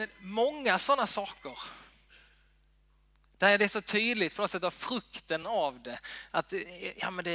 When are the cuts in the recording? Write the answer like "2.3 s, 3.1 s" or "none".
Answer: none